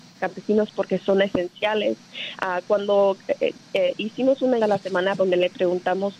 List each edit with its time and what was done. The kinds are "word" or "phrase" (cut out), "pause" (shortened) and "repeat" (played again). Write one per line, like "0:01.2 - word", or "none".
0:03.7 - word
0:04.6 - word
0:05.2 - word